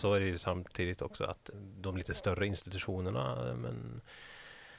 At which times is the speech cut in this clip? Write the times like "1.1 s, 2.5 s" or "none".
1.5 s